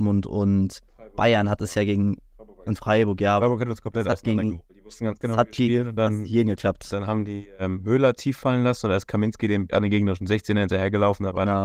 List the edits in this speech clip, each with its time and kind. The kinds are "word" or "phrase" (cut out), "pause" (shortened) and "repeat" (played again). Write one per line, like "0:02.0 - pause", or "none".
0:04.7 - pause
0:09.7 - word

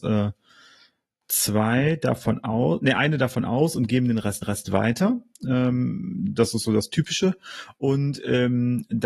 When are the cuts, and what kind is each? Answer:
0:04.4 - repeat

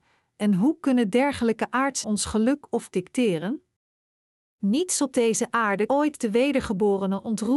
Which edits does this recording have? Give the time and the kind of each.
0:02.0 - word
0:02.9 - word
0:05.9 - word

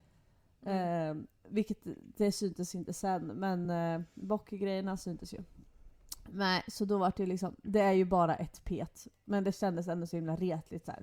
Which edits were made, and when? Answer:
none

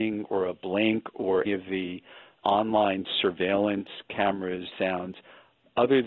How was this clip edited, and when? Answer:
0:01.5 - word
0:04.7 - word

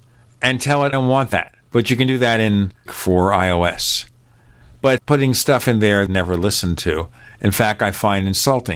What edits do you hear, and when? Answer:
0:00.9 - word
0:01.6 - pause
0:02.9 - word
0:05.0 - word
0:06.1 - phrase

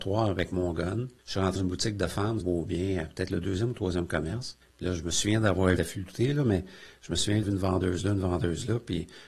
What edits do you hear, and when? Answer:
0:01.2 - pause
0:01.6 - word
0:02.4 - phrase
0:04.6 - pause
0:05.8 - phrase
0:07.4 - word

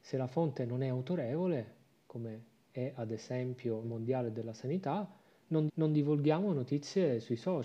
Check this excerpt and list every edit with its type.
0:02.6 - pause
0:03.8 - word
0:05.7 - repeat

